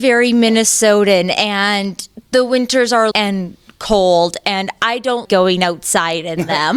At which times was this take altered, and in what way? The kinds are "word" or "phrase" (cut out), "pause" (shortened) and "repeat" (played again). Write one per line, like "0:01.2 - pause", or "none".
0:03.1 - word
0:05.3 - word